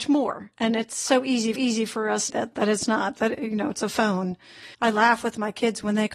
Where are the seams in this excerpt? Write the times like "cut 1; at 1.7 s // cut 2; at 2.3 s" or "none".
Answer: cut 1; at 1.6 s // cut 2; at 2.3 s // cut 3; at 4.7 s

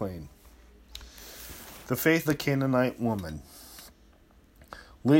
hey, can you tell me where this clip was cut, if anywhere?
cut 1; at 2.3 s

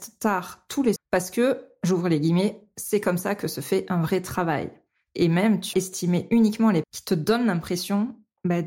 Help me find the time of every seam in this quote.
cut 1; at 1.0 s // cut 2; at 5.7 s // cut 3; at 6.8 s

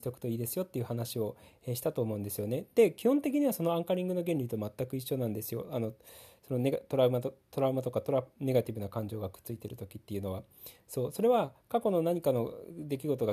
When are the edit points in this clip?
none

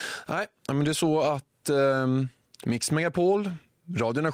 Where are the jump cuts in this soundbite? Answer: none

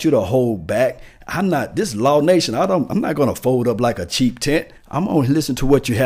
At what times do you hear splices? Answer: cut 1; at 4.8 s

